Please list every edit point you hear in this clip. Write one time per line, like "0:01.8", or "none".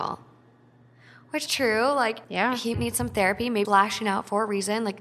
0:01.5
0:02.2
0:02.7
0:03.6